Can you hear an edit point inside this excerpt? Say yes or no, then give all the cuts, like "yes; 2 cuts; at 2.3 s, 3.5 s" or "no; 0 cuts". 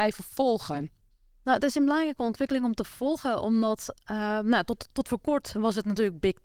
no; 0 cuts